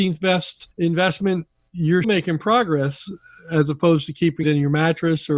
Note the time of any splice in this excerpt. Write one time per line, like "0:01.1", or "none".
0:02.0
0:04.4